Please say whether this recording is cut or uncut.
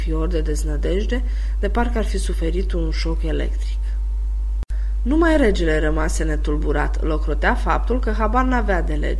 uncut